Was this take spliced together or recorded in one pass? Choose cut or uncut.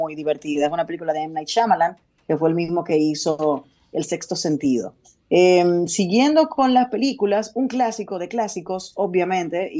uncut